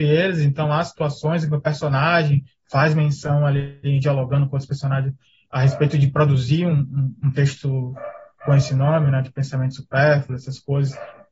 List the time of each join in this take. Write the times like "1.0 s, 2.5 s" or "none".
none